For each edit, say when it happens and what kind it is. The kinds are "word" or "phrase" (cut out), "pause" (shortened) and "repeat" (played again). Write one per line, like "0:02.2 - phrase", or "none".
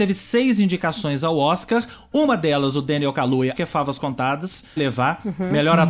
0:03.5 - word
0:04.8 - word